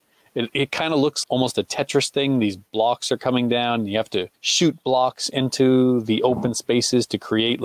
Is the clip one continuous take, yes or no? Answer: no